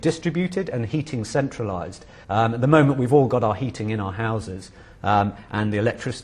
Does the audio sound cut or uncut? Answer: cut